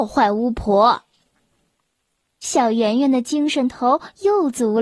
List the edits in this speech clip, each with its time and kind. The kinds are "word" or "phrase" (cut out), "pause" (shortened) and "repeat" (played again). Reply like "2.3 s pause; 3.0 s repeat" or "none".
none

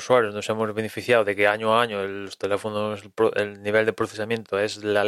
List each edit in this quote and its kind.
none

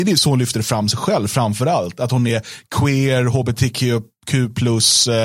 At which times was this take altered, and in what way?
none

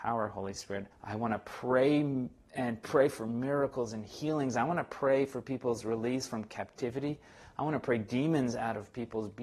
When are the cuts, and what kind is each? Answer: 0.9 s pause

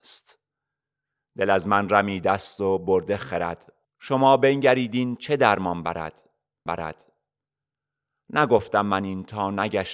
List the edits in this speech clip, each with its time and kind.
3.8 s pause; 6.7 s repeat

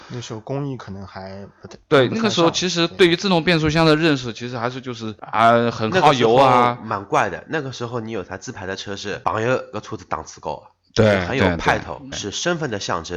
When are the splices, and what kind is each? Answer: 12.1 s word

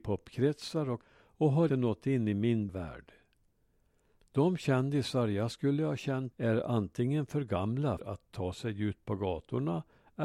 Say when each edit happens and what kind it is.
1.0 s word; 1.7 s word; 2.7 s word; 6.3 s word; 8.0 s word

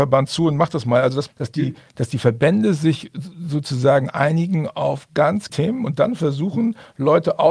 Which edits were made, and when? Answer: 1.3 s word; 5.5 s word

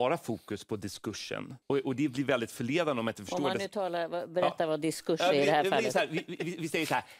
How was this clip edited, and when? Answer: 1.6 s pause

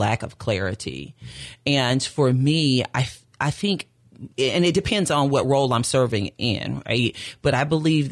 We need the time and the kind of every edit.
4.3 s pause

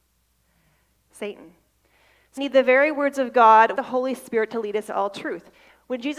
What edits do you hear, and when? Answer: 2.4 s word; 3.7 s word; 4.9 s word

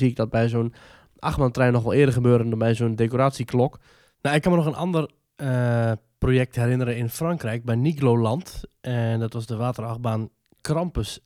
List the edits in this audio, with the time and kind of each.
none

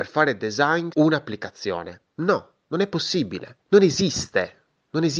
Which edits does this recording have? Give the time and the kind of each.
0.9 s word; 3.6 s pause

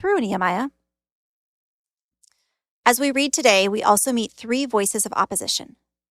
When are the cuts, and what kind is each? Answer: none

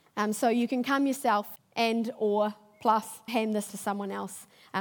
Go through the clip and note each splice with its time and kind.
1.6 s word; 3.3 s word; 3.7 s word

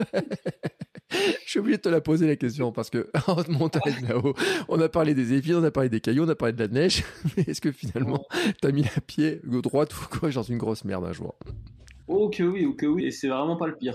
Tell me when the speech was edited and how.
12.0 s pause; 13.0 s word

